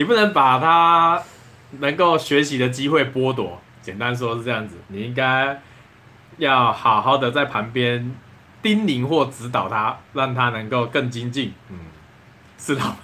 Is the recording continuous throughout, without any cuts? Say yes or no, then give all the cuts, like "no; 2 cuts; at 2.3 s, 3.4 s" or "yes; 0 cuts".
yes; 0 cuts